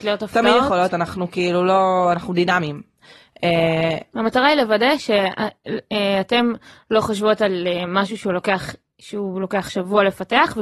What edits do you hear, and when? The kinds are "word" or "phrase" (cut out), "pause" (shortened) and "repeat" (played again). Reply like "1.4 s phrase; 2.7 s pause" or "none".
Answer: none